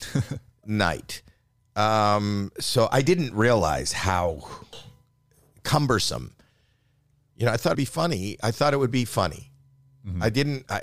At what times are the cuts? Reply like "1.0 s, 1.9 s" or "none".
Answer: 7.7 s